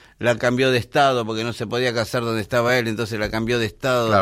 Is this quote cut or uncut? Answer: uncut